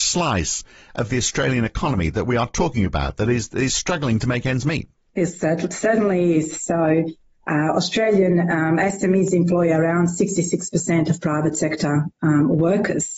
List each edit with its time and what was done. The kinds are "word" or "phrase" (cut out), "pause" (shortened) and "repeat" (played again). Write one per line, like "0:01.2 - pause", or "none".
none